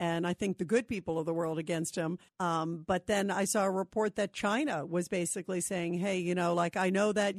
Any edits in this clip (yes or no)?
yes